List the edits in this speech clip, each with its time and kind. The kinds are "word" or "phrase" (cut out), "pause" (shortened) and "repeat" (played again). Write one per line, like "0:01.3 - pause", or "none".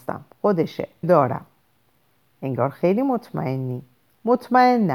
0:01.0 - word
0:04.0 - pause